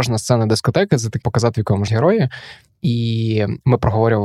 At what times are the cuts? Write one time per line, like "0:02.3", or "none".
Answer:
0:01.2
0:01.5
0:01.9